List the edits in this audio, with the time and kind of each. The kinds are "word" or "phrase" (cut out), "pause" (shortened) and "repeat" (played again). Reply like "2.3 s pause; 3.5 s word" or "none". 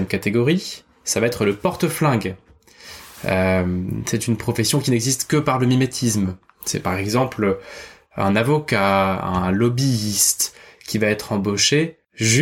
none